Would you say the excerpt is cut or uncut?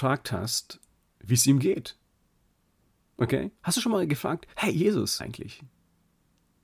cut